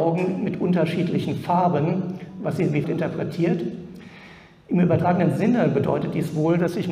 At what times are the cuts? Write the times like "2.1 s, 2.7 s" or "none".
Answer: 2.8 s